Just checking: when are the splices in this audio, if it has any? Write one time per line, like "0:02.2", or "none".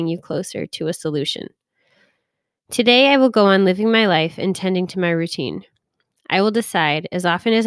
none